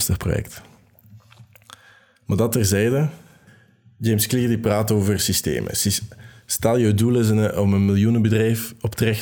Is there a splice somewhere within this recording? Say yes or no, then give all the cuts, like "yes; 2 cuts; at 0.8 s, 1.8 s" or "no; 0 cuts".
no; 0 cuts